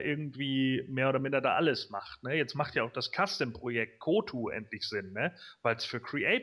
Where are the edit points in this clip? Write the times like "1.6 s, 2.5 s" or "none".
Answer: none